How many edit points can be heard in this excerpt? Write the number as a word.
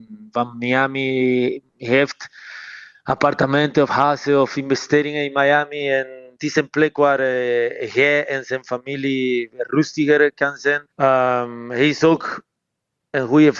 two